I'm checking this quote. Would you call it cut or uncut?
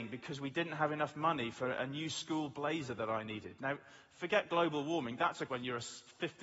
cut